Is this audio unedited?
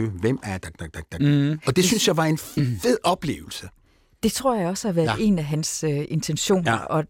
yes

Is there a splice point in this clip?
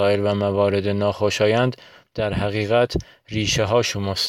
no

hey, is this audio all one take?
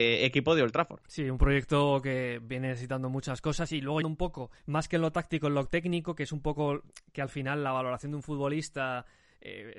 no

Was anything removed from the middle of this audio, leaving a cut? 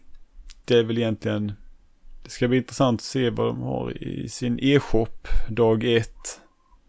no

